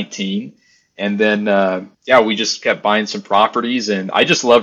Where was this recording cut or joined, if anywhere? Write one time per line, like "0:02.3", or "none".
0:01.9